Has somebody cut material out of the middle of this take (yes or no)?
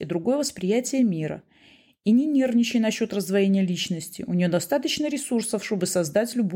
no